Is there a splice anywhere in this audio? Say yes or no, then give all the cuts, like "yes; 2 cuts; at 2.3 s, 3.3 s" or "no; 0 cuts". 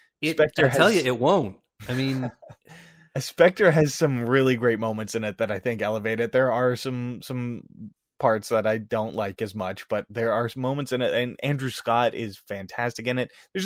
no; 0 cuts